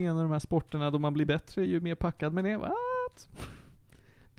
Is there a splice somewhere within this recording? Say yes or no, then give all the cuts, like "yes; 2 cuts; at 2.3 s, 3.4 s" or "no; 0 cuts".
no; 0 cuts